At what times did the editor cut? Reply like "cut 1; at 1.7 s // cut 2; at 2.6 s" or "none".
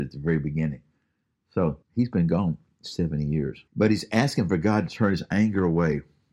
cut 1; at 1.8 s // cut 2; at 3.7 s

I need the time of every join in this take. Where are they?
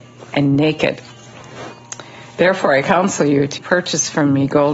cut 1; at 3.6 s

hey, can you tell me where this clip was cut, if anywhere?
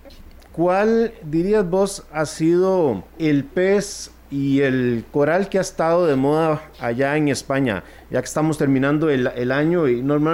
cut 1; at 3.1 s

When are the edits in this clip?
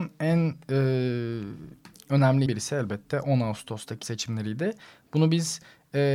cut 1; at 2.5 s // cut 2; at 4.0 s

